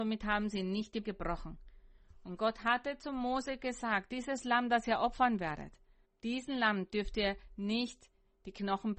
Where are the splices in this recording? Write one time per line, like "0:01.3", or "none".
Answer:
0:01.0
0:06.0